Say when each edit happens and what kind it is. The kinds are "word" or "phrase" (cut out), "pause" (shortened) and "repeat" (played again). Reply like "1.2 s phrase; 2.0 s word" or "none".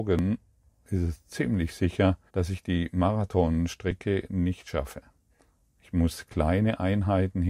2.3 s pause; 5.3 s pause